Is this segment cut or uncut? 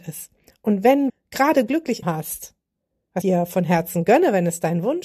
cut